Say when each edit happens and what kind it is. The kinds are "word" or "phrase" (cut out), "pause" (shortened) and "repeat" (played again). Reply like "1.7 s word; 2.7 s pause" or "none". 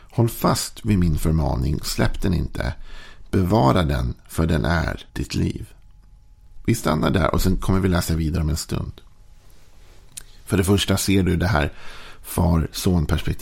5.1 s pause